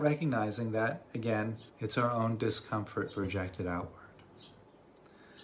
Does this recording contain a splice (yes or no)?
yes